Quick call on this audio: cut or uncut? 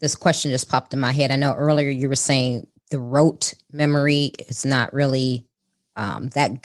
uncut